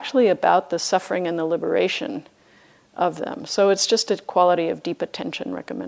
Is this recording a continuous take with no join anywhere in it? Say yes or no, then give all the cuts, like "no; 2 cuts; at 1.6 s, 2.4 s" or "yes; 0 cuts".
yes; 0 cuts